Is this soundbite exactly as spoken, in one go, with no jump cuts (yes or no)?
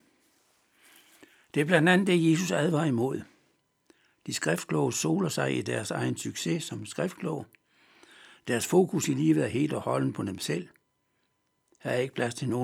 yes